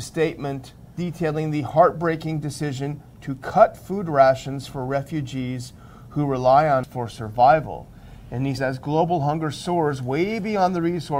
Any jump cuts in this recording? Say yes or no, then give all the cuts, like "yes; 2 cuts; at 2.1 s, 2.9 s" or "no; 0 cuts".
yes; 3 cuts; at 0.9 s, 6.8 s, 8.6 s